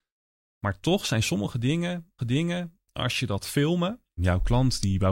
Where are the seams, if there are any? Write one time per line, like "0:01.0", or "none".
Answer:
0:02.2
0:03.4
0:04.2